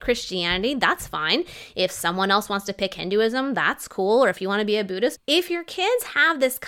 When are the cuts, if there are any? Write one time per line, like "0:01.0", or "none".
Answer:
0:05.2